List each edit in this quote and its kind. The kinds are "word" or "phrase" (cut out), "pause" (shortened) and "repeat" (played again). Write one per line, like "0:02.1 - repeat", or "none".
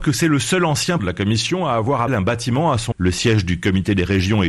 0:01.0 - word
0:02.1 - word
0:02.9 - word